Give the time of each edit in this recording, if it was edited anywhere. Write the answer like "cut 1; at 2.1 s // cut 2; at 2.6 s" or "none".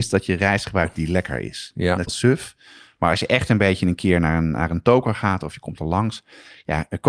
cut 1; at 2.1 s